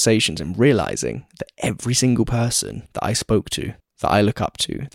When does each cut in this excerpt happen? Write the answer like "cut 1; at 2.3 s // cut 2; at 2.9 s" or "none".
cut 1; at 2.9 s // cut 2; at 3.8 s